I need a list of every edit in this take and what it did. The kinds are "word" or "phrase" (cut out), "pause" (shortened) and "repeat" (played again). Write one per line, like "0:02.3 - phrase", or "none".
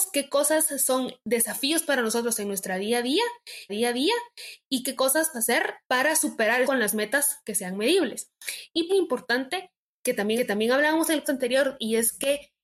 0:03.7 - repeat
0:05.3 - word
0:05.8 - pause
0:06.6 - phrase
0:08.9 - phrase
0:10.4 - repeat
0:11.2 - word